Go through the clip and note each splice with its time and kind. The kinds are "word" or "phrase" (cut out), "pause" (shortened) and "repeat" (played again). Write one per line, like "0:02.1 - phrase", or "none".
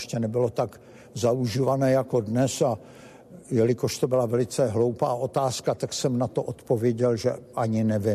none